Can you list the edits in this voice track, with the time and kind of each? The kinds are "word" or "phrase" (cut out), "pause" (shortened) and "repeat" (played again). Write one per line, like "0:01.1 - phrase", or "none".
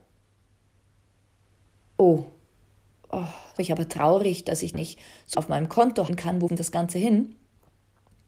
0:03.0 - word
0:03.6 - word
0:04.7 - word
0:05.3 - word
0:06.1 - word
0:06.5 - word